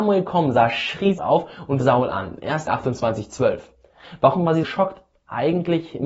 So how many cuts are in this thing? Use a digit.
4